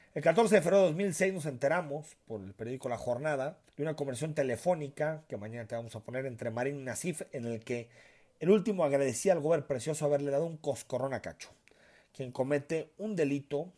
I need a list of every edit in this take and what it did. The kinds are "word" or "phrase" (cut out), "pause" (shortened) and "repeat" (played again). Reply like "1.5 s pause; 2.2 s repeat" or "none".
3.7 s pause